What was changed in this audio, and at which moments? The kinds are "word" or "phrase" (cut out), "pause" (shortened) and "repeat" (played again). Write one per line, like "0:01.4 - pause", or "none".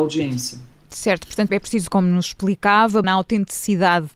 0:01.5 - word
0:01.9 - phrase
0:03.0 - word